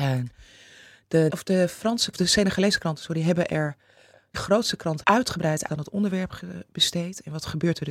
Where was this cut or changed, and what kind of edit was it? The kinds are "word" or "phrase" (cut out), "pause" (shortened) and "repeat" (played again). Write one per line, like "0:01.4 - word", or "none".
0:01.3 - word
0:02.1 - word
0:04.3 - word
0:05.0 - word
0:05.7 - word